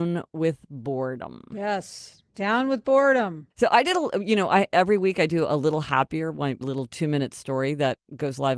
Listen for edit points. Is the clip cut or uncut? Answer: cut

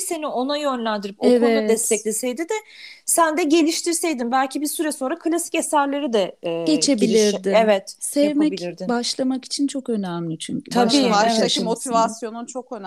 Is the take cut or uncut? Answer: uncut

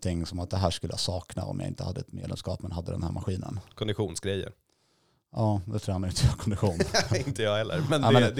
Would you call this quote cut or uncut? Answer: uncut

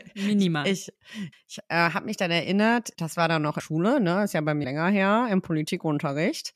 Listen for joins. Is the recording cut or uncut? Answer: cut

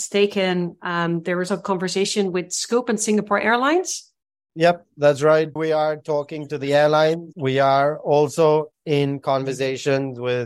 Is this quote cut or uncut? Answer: cut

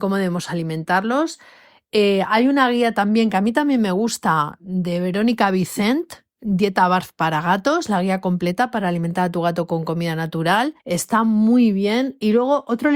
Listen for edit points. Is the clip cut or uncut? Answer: cut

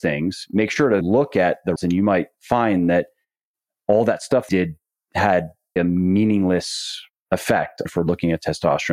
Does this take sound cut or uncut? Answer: cut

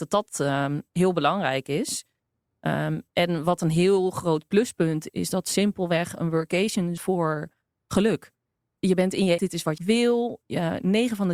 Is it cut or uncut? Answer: cut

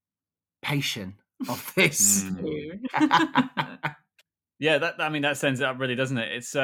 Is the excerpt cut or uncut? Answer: uncut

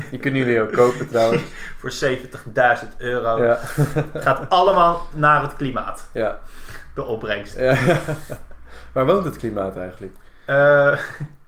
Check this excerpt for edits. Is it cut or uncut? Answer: uncut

